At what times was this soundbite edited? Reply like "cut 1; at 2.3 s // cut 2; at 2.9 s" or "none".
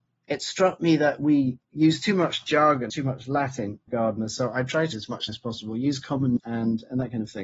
cut 1; at 1.6 s // cut 2; at 2.9 s // cut 3; at 3.9 s // cut 4; at 4.9 s // cut 5; at 5.3 s // cut 6; at 6.4 s